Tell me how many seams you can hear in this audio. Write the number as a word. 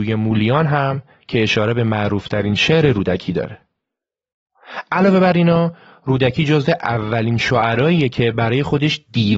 zero